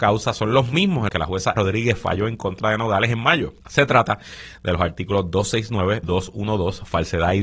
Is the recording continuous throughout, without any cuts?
no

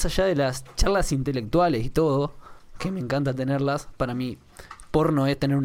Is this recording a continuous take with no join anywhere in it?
yes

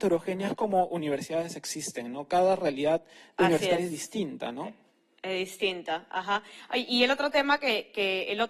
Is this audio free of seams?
yes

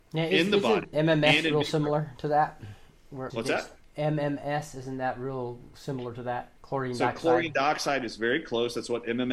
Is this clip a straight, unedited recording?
no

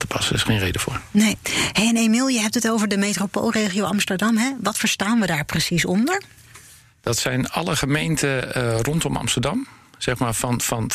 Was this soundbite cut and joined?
no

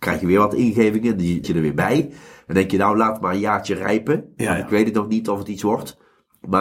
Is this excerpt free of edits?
no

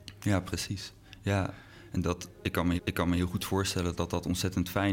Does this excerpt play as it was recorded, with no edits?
no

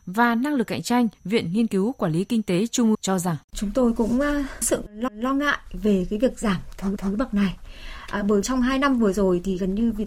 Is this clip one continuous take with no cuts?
no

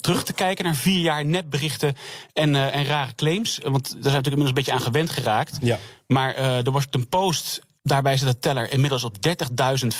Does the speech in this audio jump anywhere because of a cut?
yes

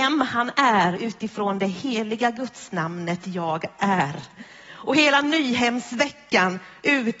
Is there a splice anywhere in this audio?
no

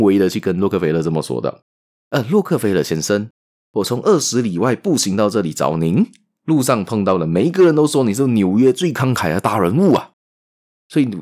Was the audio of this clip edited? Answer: no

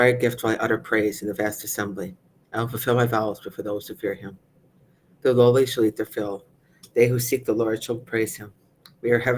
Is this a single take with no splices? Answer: yes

